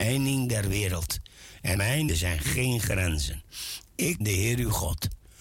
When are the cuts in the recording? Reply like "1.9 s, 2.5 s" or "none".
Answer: 1.8 s, 2.1 s, 4.2 s